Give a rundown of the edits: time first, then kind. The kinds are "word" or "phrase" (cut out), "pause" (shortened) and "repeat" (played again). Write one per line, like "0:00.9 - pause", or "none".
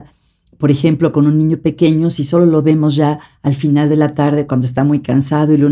none